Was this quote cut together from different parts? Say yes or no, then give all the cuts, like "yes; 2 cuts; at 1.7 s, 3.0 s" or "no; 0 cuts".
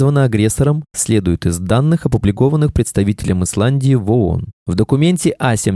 no; 0 cuts